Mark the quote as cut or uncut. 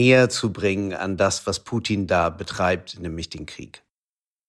uncut